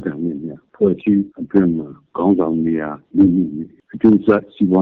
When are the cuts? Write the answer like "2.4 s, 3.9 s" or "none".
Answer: 1.3 s, 3.1 s